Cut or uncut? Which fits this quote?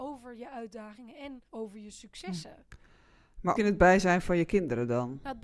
cut